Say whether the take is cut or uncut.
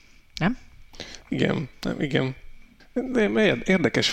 cut